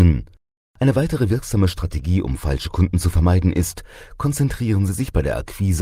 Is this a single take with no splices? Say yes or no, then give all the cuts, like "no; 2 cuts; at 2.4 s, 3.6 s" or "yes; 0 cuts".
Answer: yes; 0 cuts